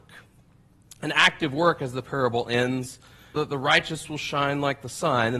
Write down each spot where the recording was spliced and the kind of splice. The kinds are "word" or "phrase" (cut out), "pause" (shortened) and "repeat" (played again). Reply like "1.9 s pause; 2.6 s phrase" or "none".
3.4 s word